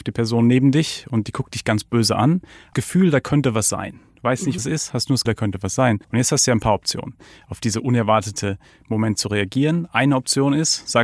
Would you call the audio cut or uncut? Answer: cut